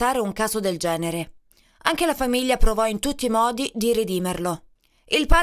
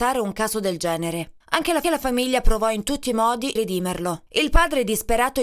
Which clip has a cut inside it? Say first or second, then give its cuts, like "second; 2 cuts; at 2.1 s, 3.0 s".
second; 4 cuts; at 1.4 s, 1.8 s, 3.6 s, 4.3 s